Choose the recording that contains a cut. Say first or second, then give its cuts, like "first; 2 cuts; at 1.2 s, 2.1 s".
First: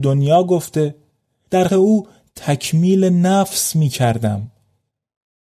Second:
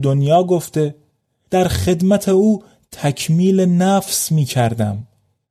first; 1 cut; at 1.7 s